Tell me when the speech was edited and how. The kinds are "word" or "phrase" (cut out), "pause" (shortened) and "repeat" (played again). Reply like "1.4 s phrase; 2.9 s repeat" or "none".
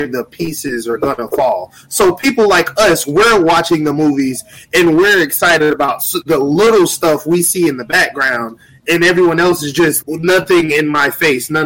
10.0 s word